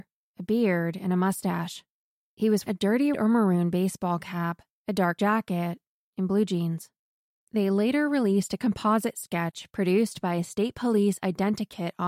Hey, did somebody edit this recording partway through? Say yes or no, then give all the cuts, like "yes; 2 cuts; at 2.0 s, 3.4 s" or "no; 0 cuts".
yes; 3 cuts; at 2.7 s, 3.1 s, 5.2 s